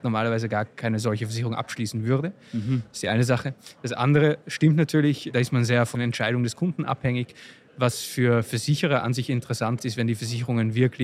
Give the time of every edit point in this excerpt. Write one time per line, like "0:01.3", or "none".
0:05.9
0:09.8